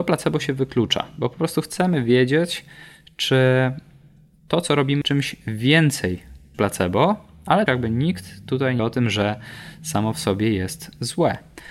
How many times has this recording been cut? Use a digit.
4